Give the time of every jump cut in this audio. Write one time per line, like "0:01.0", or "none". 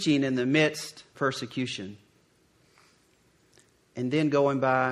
0:01.1